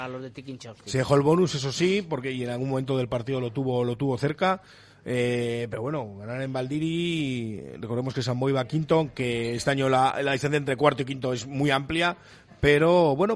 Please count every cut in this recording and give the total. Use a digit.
0